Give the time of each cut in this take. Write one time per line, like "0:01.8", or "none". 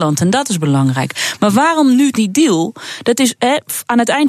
0:02.1